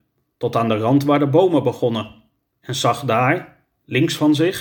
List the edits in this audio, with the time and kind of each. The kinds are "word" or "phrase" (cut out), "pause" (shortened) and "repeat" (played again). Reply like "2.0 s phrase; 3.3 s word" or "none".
none

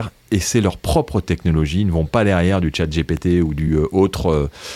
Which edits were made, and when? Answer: none

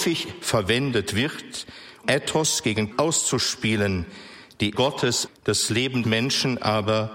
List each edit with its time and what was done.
2.0 s word; 2.9 s word; 4.7 s word; 5.3 s phrase; 6.0 s word

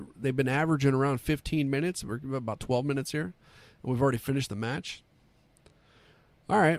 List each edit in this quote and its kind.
none

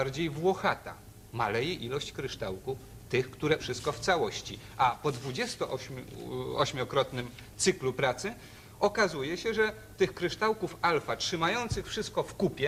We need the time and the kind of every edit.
3.6 s word

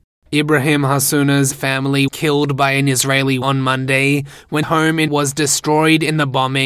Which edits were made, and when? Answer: 1.5 s word; 2.1 s word; 3.4 s word; 4.6 s word; 5.1 s word

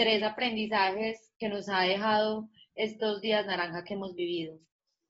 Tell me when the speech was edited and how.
none

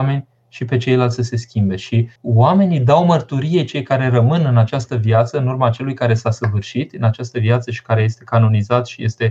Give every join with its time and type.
2.2 s pause

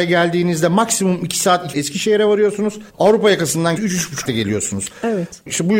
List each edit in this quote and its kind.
1.7 s phrase; 2.9 s pause; 3.8 s word; 4.2 s word

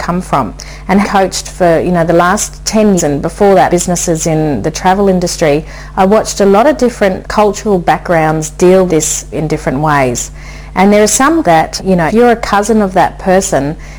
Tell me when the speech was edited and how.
1.0 s word; 3.0 s word; 3.7 s word; 7.2 s word; 8.9 s word; 9.3 s word; 11.4 s word; 11.8 s word; 12.1 s word

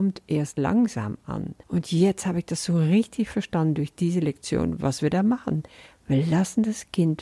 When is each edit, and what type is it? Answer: 1.6 s pause

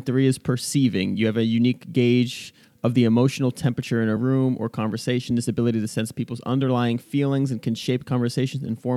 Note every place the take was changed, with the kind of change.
none

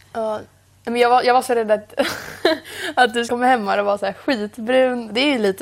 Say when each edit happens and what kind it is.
3.3 s word

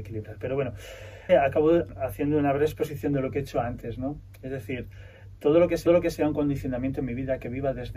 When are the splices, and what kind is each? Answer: 1.3 s word; 5.9 s repeat

